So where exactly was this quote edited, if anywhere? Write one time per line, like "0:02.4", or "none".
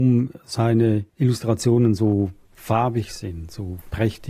0:01.1

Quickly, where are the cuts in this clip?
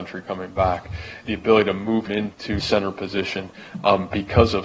0:01.2
0:02.1
0:02.6

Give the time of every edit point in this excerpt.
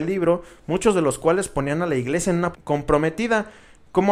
0:02.5

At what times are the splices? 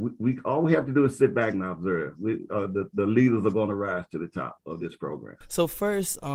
none

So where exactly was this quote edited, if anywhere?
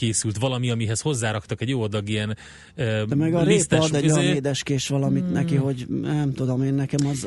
none

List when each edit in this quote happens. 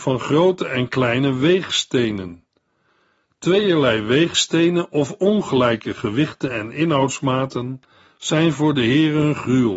none

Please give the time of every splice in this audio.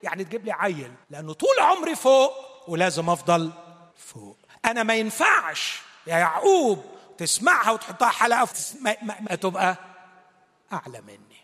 0:01.0
0:03.9
0:08.5
0:09.3

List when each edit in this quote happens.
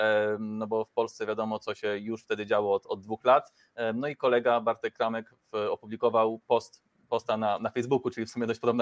none

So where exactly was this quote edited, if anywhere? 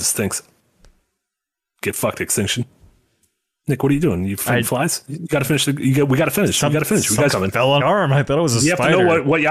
0:07.3
0:07.8

